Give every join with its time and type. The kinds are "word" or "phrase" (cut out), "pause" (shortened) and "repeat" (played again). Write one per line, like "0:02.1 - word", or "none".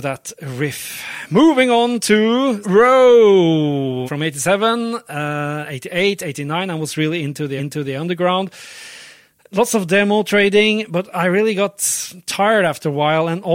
0:02.6 - word
0:04.1 - word
0:07.6 - repeat